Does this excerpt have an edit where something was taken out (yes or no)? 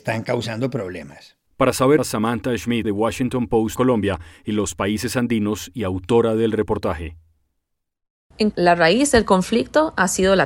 yes